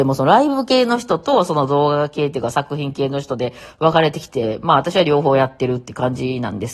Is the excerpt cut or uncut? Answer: uncut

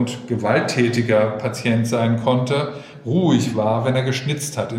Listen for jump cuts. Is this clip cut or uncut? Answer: uncut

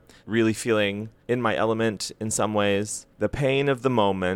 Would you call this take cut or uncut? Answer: uncut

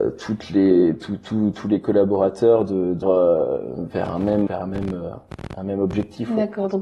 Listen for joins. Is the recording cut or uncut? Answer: cut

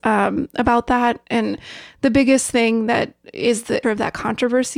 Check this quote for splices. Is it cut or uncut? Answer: cut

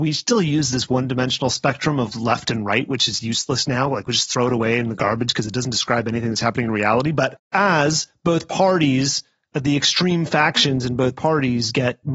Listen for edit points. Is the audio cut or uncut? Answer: cut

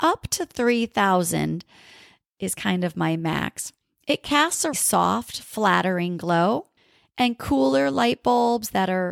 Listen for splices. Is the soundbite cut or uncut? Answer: cut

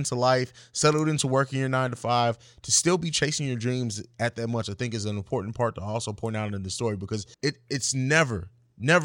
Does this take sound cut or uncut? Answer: cut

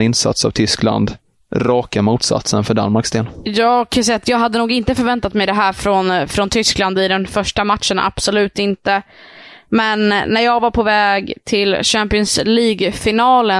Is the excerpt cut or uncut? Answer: uncut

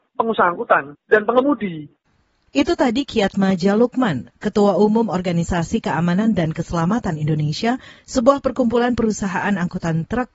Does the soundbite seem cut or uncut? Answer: uncut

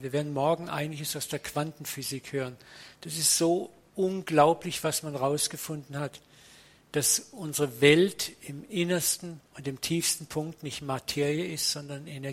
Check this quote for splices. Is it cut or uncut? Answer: cut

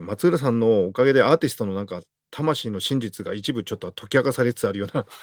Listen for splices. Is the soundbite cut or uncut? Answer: uncut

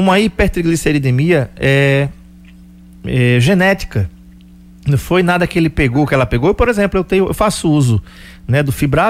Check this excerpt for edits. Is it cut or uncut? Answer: uncut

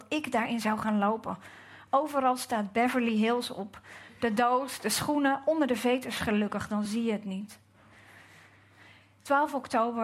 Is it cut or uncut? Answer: uncut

